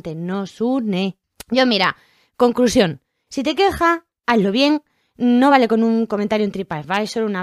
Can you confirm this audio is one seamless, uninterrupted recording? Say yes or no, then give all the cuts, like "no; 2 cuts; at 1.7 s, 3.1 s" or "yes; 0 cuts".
yes; 0 cuts